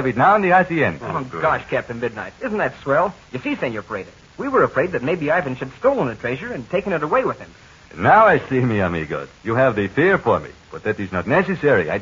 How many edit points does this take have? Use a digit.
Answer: 2